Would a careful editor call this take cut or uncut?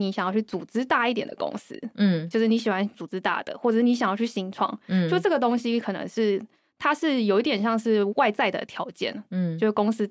uncut